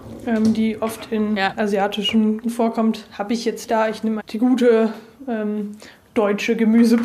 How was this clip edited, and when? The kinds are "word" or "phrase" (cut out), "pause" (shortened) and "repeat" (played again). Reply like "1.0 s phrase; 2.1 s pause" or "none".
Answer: 2.4 s word; 3.6 s word; 4.2 s word